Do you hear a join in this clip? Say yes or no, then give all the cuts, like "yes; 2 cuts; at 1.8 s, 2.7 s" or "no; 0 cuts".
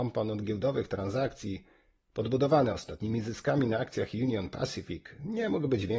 no; 0 cuts